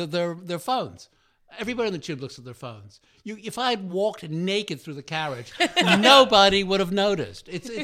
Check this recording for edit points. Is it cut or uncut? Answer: uncut